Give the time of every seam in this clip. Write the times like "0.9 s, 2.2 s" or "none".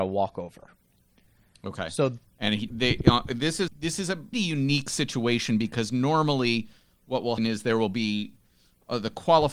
2.7 s, 3.7 s, 4.3 s, 7.4 s